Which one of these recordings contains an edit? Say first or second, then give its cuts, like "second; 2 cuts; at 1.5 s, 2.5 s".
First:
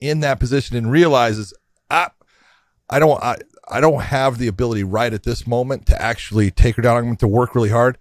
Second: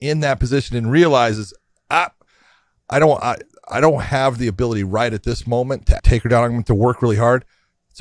second; 1 cut; at 6.0 s